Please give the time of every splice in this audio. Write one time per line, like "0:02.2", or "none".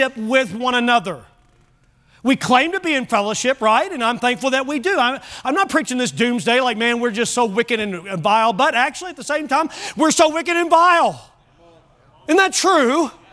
none